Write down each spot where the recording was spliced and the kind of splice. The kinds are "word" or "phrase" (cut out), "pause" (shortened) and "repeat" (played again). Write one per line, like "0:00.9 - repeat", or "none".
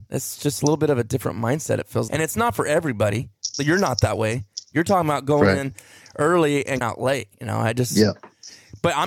0:02.1 - word
0:06.8 - word
0:07.3 - pause